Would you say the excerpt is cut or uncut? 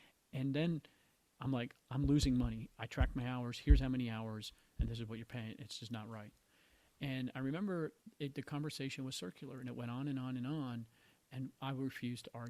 uncut